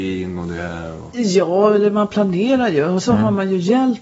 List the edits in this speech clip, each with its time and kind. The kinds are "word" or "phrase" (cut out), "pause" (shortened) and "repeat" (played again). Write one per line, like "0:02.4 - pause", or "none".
0:03.0 - word